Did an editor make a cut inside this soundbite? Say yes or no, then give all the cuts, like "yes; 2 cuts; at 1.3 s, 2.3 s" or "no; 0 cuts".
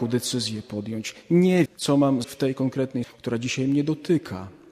yes; 3 cuts; at 1.7 s, 2.2 s, 3.0 s